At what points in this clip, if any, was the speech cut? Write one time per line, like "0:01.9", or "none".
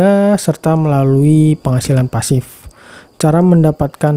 none